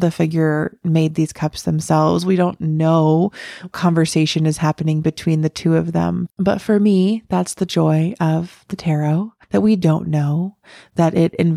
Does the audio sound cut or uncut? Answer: cut